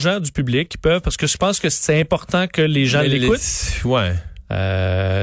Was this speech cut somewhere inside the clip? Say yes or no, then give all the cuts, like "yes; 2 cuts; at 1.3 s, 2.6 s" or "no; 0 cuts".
no; 0 cuts